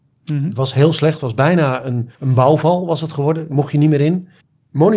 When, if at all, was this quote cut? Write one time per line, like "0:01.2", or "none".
0:02.2